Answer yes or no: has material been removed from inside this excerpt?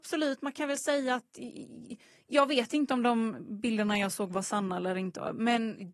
no